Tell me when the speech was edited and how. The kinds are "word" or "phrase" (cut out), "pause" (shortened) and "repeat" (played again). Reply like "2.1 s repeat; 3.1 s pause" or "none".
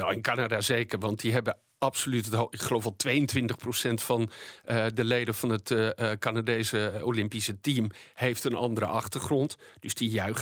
none